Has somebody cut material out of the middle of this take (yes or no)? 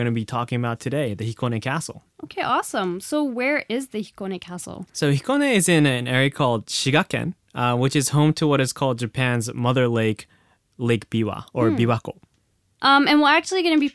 yes